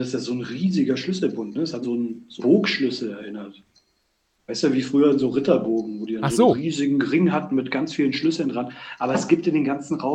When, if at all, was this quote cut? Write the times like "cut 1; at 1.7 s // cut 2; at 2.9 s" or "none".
cut 1; at 1.8 s // cut 2; at 2.4 s